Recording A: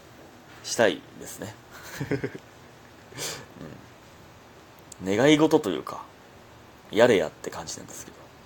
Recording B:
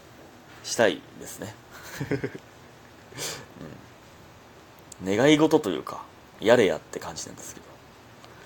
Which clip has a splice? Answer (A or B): B